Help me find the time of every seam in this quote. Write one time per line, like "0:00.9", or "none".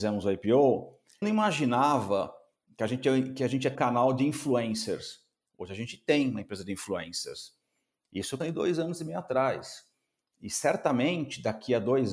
0:01.2
0:03.7
0:08.4